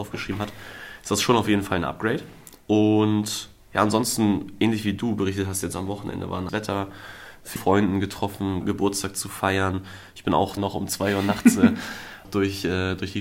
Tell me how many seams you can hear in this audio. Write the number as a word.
six